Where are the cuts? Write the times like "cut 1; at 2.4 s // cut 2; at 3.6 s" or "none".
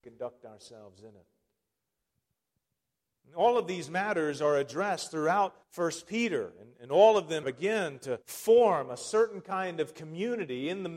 cut 1; at 5.6 s // cut 2; at 7.4 s // cut 3; at 8.2 s